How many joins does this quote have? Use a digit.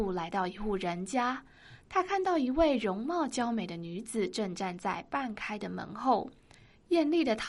0